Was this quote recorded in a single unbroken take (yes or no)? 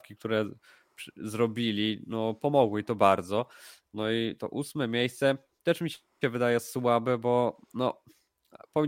yes